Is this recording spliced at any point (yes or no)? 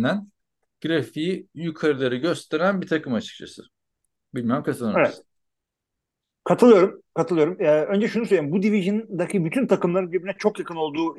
no